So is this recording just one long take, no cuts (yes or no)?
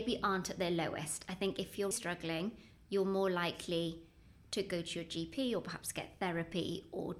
no